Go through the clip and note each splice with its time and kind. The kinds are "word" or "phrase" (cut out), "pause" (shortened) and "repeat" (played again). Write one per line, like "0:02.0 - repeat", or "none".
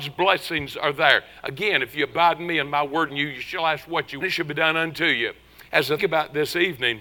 0:03.1 - word
0:04.2 - phrase
0:06.0 - word